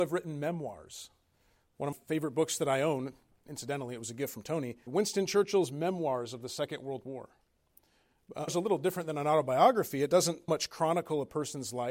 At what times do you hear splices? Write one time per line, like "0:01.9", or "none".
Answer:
0:01.9
0:03.3
0:04.9
0:08.5
0:10.5